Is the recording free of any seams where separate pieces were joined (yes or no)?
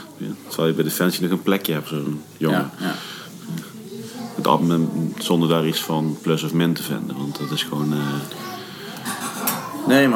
no